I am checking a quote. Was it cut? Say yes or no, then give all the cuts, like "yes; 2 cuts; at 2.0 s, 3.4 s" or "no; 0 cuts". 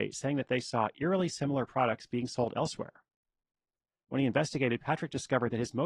no; 0 cuts